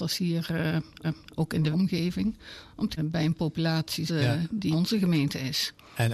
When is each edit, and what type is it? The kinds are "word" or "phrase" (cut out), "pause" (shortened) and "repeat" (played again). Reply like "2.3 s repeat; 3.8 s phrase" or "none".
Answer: 1.0 s repeat; 1.7 s word; 3.0 s phrase; 4.1 s word; 4.7 s word